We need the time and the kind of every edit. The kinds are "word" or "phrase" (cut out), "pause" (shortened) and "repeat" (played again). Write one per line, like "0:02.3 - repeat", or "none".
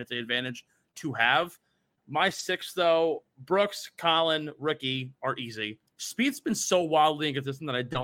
0:05.9 - pause

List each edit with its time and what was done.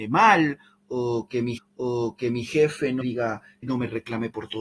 0:01.6 - repeat
0:03.0 - word
0:03.6 - word

